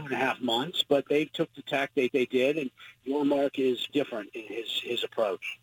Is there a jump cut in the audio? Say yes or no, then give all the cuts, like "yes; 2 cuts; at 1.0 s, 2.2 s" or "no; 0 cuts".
yes; 2 cuts; at 2.1 s, 3.9 s